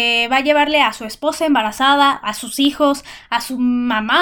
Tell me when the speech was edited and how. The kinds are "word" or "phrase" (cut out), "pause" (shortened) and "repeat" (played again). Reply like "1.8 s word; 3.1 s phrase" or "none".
none